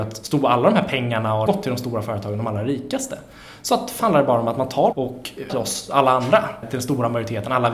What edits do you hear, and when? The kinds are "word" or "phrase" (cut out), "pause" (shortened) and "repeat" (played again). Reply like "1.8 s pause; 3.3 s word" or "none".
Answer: 1.5 s phrase; 4.0 s word; 4.9 s word; 5.5 s word; 6.6 s word